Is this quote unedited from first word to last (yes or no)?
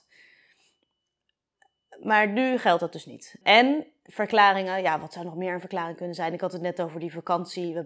yes